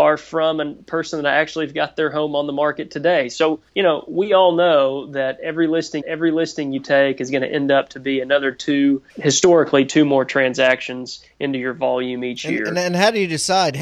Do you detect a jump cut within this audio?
yes; 3 cuts; at 3.7 s, 6.0 s, 9.1 s

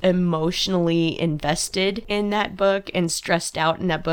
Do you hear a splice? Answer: no; 0 cuts

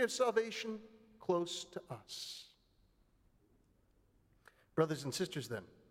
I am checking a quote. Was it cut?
no; 0 cuts

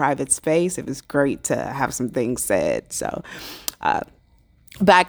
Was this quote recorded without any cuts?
yes; 0 cuts

